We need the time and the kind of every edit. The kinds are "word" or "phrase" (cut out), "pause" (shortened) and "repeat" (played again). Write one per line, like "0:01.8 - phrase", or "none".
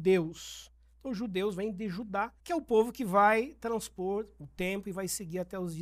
0:02.4 - pause